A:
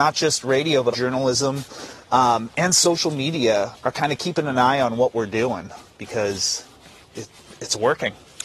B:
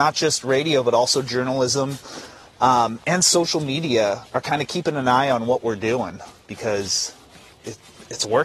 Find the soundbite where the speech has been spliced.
A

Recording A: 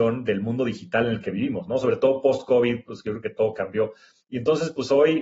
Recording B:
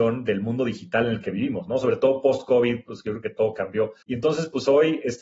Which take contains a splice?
B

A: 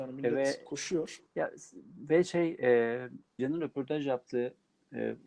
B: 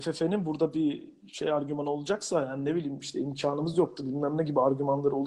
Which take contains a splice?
A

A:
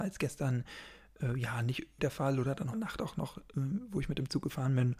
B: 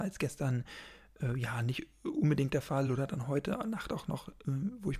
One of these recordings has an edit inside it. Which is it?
A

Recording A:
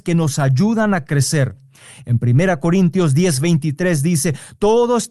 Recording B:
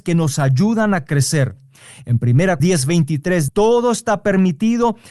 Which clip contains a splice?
B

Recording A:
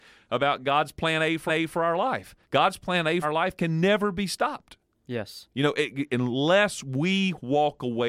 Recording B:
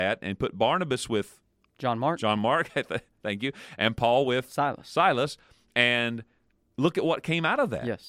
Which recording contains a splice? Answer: A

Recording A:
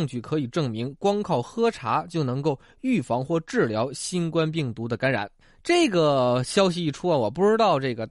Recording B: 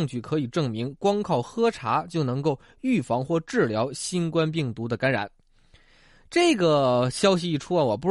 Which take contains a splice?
A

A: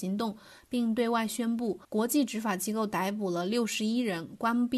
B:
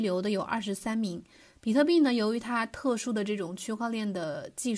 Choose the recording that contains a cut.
A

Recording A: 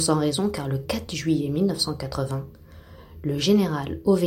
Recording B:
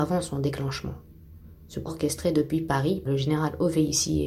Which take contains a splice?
B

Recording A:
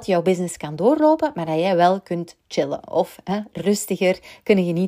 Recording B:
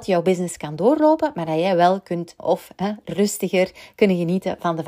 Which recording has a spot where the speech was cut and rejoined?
B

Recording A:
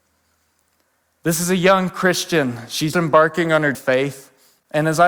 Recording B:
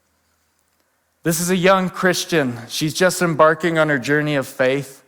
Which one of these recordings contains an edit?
A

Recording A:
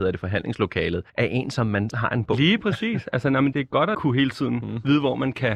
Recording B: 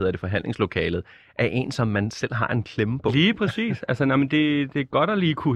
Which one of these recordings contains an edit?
A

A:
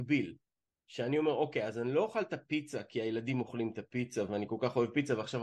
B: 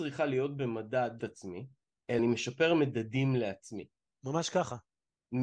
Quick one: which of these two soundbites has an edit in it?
B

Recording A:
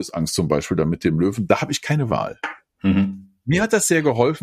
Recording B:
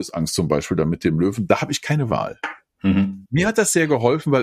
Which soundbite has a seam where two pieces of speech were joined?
B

